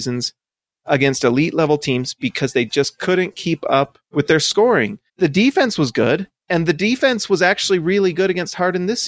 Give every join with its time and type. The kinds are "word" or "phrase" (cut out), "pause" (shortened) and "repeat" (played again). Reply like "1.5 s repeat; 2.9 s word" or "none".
4.0 s pause; 5.1 s pause